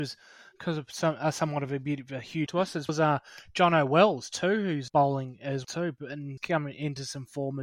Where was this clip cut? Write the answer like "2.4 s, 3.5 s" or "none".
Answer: 2.5 s, 2.9 s, 4.9 s, 5.6 s, 6.4 s

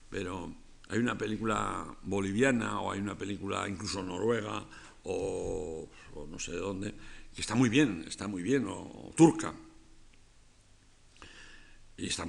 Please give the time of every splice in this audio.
none

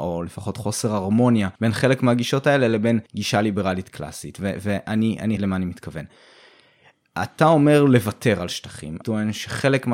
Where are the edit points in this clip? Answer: 1.6 s, 3.1 s, 5.4 s, 9.0 s

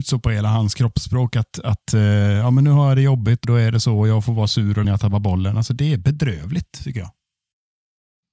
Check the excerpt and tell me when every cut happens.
3.4 s, 4.8 s

